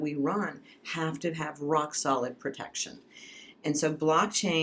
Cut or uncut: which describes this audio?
uncut